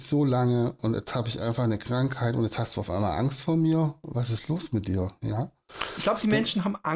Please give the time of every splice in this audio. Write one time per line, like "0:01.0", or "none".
none